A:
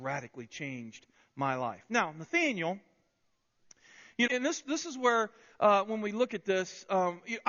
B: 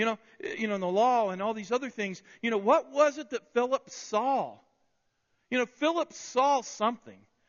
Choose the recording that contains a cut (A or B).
A